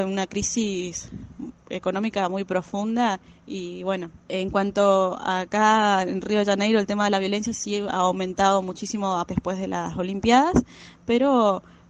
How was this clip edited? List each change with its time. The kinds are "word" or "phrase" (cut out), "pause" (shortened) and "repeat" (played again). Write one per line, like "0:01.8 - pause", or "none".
0:03.3 - pause
0:04.2 - pause
0:09.3 - word